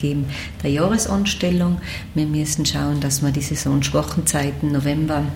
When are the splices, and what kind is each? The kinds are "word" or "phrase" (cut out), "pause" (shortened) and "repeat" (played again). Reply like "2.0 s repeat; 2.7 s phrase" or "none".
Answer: none